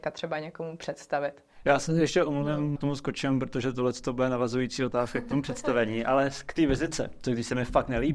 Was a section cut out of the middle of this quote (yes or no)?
yes